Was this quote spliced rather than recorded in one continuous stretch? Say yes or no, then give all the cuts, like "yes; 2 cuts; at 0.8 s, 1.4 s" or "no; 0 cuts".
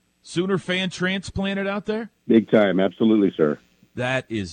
yes; 1 cut; at 2.2 s